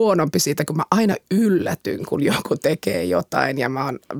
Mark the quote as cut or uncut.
uncut